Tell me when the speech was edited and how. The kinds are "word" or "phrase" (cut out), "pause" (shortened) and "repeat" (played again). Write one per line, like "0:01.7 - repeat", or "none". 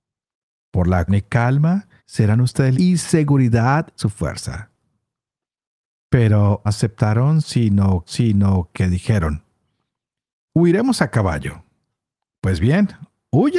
0:01.1 - word
0:02.0 - pause
0:02.7 - phrase
0:04.0 - word
0:06.6 - phrase
0:08.1 - repeat
0:10.5 - word

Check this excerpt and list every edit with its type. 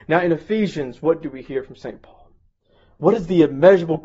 none

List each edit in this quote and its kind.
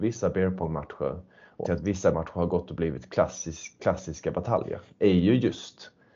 0:01.6 - word
0:02.1 - word
0:03.8 - word

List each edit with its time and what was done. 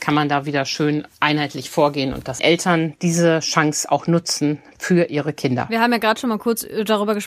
0:02.4 - phrase

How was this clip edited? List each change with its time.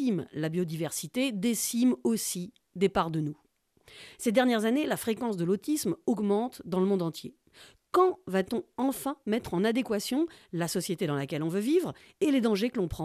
none

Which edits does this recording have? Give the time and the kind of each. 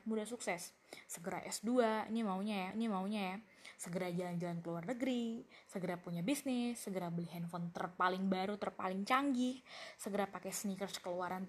0:02.7 - repeat

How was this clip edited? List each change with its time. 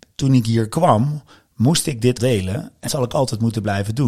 0:02.2 - word
0:02.9 - word

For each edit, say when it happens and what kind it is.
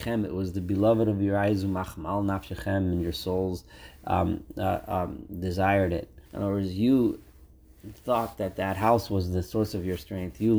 0:06.3 - pause

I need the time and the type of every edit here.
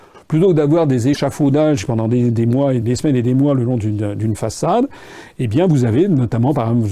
0:02.8 - word

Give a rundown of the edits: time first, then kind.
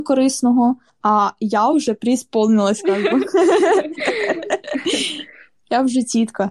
none

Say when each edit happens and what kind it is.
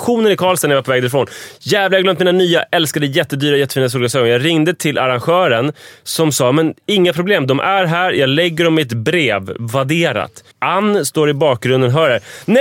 0:10.5 - pause

